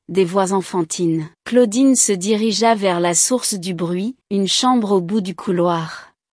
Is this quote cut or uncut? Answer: cut